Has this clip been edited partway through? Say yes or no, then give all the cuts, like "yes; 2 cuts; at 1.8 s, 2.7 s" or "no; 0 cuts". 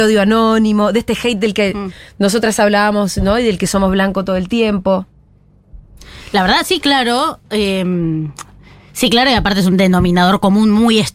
no; 0 cuts